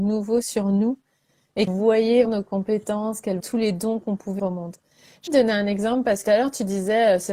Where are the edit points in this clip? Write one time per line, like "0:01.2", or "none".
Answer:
0:01.7
0:02.2
0:03.4
0:04.4
0:05.3
0:06.2